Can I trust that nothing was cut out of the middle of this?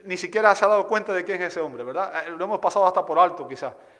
yes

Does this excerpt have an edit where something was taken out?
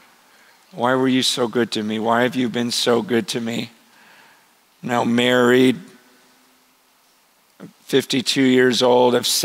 no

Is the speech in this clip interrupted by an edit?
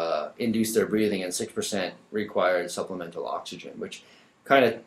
no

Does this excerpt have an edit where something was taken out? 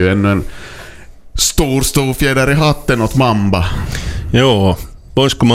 no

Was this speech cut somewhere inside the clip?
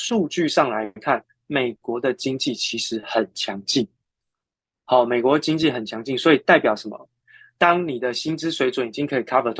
no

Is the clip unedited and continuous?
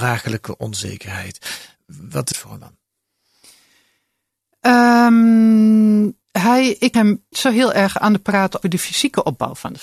no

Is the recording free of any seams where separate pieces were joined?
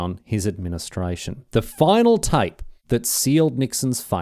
no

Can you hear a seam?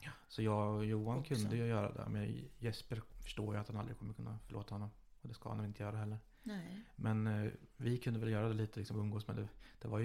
no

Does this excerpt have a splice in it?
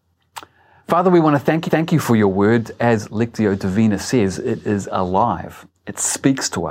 yes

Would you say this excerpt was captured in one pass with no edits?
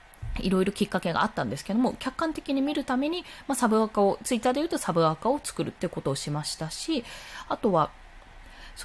yes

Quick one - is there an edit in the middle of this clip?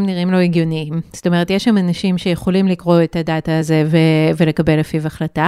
no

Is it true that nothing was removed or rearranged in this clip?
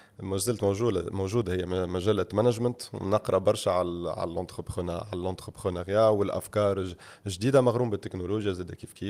yes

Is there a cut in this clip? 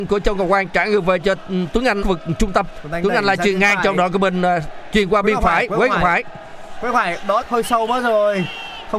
yes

